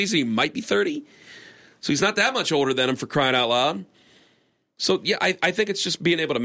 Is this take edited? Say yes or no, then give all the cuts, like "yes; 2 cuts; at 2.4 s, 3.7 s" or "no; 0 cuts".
no; 0 cuts